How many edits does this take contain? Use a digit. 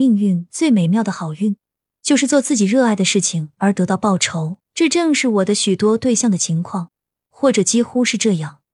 1